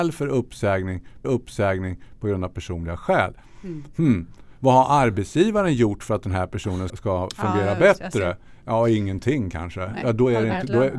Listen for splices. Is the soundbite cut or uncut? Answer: cut